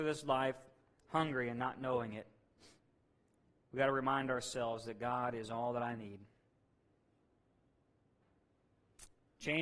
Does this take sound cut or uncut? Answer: uncut